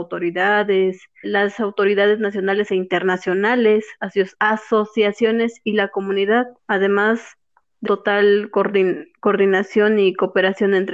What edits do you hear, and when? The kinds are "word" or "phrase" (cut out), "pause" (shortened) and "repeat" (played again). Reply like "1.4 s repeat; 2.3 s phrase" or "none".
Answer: 1.2 s word; 4.3 s pause; 6.6 s pause; 7.9 s word